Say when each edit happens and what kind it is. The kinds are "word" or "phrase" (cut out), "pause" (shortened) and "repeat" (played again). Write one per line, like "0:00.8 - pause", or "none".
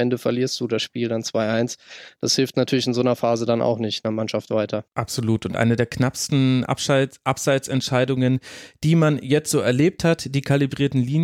0:04.9 - pause